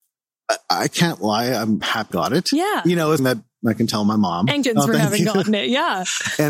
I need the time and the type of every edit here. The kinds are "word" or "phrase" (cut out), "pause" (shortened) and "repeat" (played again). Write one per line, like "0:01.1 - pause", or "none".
0:01.8 - word
0:02.1 - word
0:03.2 - word
0:04.6 - word